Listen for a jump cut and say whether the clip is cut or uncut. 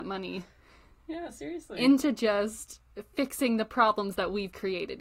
uncut